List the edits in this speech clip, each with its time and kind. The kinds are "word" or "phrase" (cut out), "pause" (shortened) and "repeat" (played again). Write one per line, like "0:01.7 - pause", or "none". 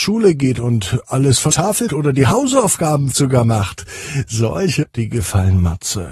0:01.5 - word
0:01.9 - word
0:03.1 - word
0:04.8 - word